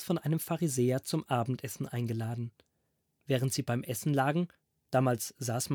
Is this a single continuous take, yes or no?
yes